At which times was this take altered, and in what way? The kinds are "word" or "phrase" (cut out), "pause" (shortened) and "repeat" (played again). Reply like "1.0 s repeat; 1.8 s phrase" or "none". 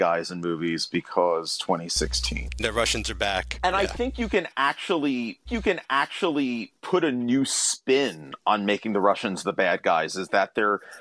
5.5 s repeat